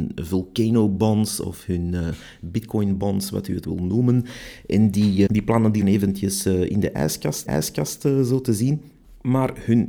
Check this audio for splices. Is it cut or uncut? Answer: cut